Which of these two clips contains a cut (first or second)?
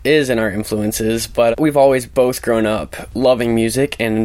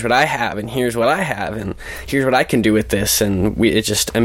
first